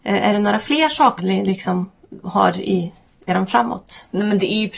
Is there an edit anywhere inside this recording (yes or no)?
yes